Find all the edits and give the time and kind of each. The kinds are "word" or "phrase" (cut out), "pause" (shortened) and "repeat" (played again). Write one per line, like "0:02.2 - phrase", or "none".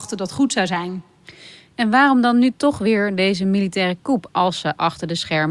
none